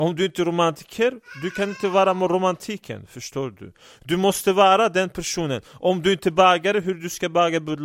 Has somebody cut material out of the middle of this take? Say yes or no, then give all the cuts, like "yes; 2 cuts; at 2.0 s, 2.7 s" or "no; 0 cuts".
no; 0 cuts